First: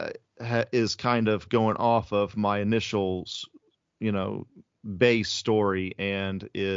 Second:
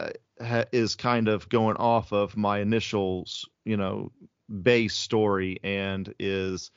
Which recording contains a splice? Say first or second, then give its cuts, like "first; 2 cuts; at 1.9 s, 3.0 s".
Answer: second; 1 cut; at 3.5 s